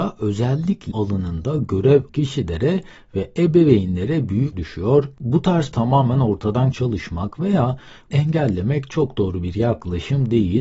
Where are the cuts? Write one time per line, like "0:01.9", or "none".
0:00.9
0:02.1
0:04.5
0:05.7
0:06.7
0:08.1